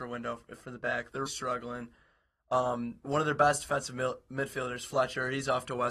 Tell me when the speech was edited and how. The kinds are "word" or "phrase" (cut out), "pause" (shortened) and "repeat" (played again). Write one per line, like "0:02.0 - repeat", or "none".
0:01.3 - word
0:03.0 - word